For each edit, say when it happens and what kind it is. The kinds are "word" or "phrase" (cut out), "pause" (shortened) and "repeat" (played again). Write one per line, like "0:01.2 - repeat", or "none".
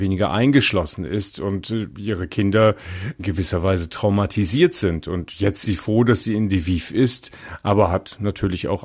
0:05.6 - word